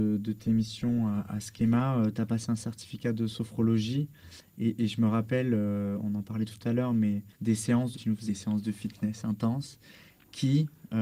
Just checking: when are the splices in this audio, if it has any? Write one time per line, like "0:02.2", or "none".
0:07.3
0:07.9
0:08.3